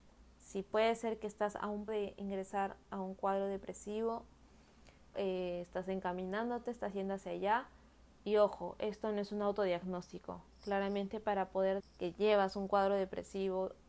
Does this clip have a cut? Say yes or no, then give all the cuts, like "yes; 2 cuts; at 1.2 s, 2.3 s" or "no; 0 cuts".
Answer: yes; 3 cuts; at 1.9 s, 5.1 s, 11.8 s